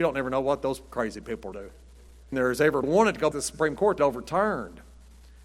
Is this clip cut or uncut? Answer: cut